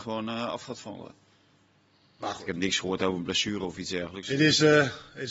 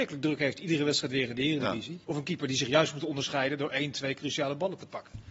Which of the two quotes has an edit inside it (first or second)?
second